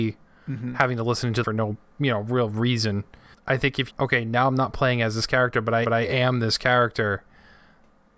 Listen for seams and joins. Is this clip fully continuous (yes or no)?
no